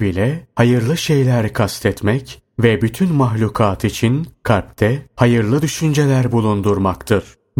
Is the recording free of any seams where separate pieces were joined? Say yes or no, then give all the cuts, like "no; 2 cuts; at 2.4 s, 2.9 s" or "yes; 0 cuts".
yes; 0 cuts